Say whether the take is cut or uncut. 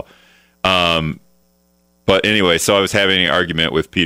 uncut